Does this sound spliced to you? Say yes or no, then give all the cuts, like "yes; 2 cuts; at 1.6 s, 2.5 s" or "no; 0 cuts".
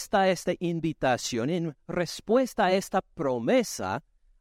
no; 0 cuts